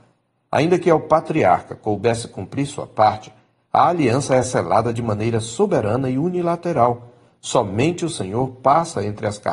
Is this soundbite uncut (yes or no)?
yes